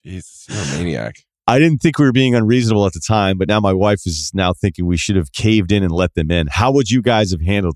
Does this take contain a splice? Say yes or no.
no